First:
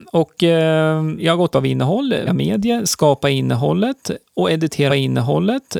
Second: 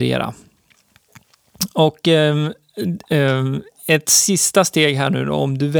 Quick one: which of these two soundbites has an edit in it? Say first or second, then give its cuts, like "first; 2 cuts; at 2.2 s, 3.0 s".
first; 4 cuts; at 1.2 s, 1.5 s, 2.3 s, 4.9 s